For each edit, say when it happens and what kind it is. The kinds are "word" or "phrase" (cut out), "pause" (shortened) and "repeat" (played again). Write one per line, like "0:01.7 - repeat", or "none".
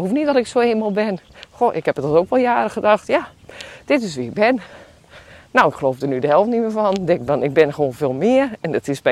none